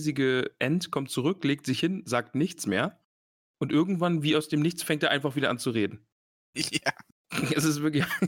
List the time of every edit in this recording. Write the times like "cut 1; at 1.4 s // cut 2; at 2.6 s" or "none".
none